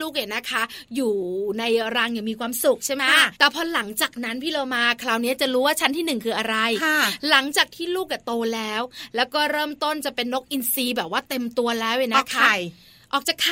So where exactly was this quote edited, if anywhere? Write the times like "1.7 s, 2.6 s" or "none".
3.4 s